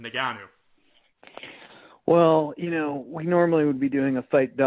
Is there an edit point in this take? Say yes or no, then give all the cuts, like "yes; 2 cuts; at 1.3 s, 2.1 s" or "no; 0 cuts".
no; 0 cuts